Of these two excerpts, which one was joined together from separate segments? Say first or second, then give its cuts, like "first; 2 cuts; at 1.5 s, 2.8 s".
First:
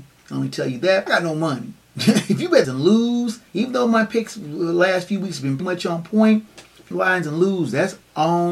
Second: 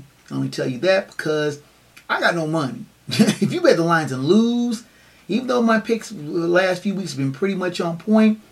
first; 5 cuts; at 1.1 s, 2.6 s, 3.5 s, 5.6 s, 6.9 s